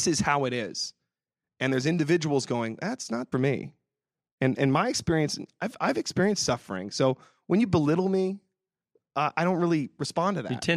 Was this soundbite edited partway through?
yes; 1 cut; at 3.3 s

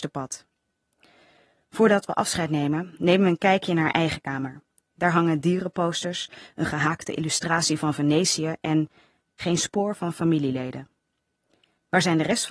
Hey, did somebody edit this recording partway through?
no; 0 cuts

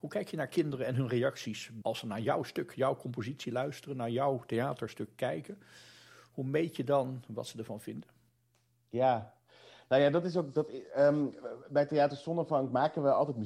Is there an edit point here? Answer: no; 0 cuts

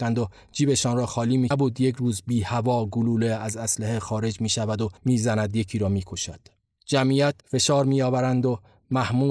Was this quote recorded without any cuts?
no; 3 cuts; at 1.5 s, 5.0 s, 7.4 s

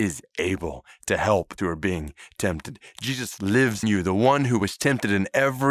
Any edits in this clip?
yes; 2 cuts; at 1.6 s, 3.8 s

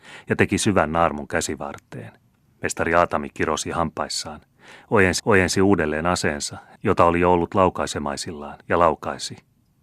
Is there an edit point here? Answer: yes; 3 cuts; at 2.4 s, 5.2 s, 8.6 s

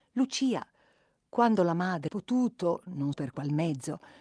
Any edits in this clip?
yes; 2 cuts; at 2.1 s, 3.1 s

